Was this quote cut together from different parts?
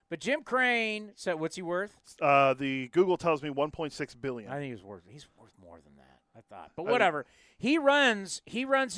no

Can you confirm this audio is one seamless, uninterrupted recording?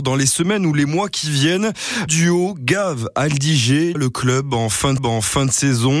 no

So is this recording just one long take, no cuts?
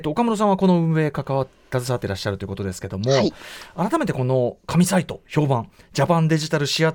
yes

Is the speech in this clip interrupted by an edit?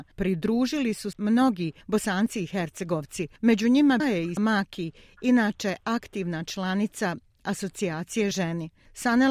yes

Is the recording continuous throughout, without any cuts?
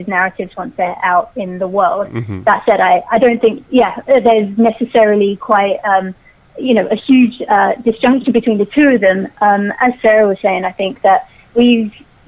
yes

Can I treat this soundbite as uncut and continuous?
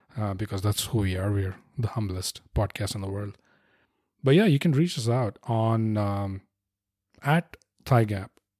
yes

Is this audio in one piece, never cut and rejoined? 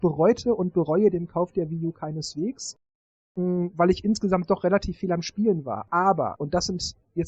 yes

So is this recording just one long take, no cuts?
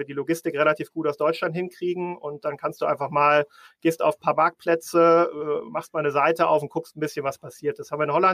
yes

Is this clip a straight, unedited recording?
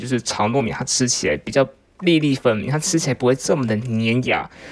yes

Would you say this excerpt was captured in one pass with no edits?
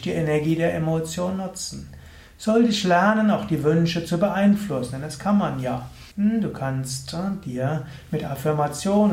no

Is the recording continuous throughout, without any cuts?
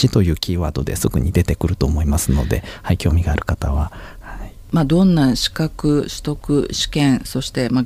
yes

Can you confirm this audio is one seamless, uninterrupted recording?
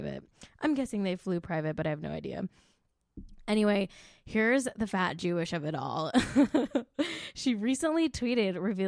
yes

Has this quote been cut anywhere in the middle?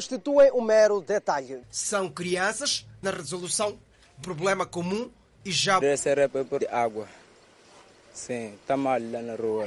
yes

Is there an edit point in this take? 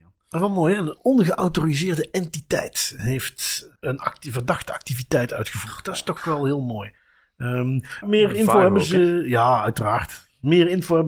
yes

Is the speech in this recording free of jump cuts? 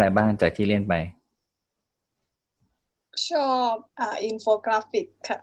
no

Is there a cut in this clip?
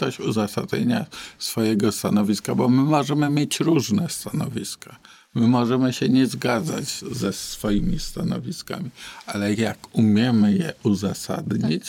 no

